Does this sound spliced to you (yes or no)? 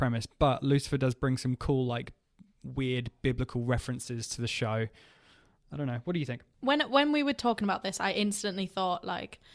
no